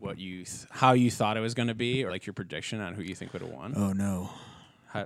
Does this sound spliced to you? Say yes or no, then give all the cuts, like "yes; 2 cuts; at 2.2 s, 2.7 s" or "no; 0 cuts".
yes; 1 cut; at 2.1 s